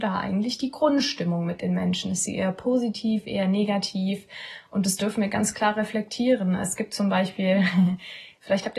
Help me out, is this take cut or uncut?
uncut